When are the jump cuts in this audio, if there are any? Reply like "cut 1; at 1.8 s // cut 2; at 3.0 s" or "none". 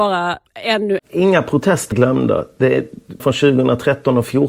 cut 1; at 1.0 s // cut 2; at 1.9 s // cut 3; at 3.2 s